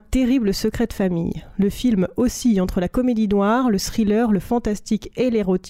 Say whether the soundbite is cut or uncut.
uncut